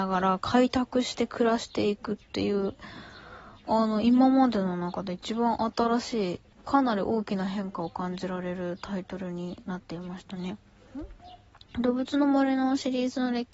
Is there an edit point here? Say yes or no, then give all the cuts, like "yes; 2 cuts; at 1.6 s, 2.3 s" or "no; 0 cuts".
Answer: yes; 1 cut; at 6.5 s